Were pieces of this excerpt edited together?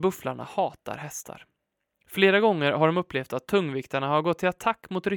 no; 0 cuts

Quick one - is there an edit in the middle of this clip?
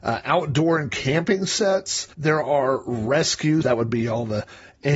yes; 2 cuts; at 2.1 s, 3.6 s

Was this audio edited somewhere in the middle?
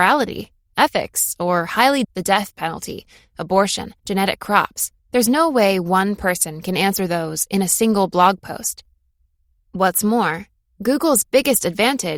yes; 3 cuts; at 2.0 s, 4.0 s, 5.0 s

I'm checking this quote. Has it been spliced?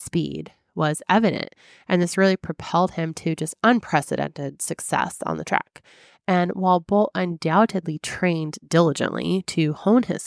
no; 0 cuts

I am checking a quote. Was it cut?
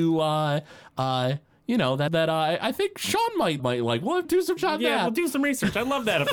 yes; 4 cuts; at 2.1 s, 3.6 s, 4.2 s, 4.6 s

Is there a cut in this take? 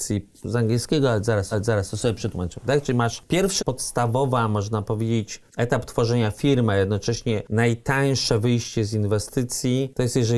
yes; 3 cuts; at 1.5 s, 3.6 s, 5.5 s

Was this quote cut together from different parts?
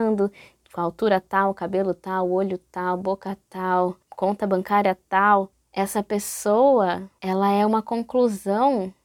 yes; 1 cut; at 4.0 s

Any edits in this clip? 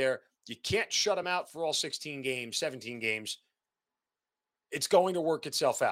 no; 0 cuts

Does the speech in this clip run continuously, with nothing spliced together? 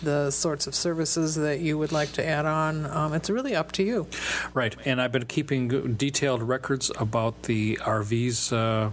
yes; 0 cuts

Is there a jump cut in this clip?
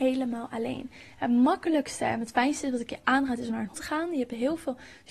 yes; 1 cut; at 3.7 s

